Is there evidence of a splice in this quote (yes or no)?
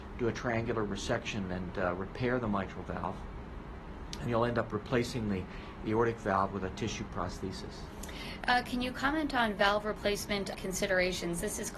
yes